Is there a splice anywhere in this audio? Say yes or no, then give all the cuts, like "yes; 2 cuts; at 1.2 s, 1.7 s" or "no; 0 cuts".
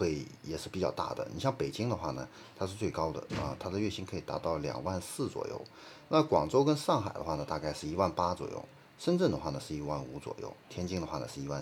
no; 0 cuts